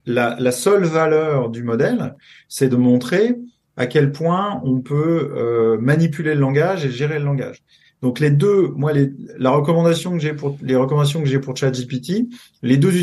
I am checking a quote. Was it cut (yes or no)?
no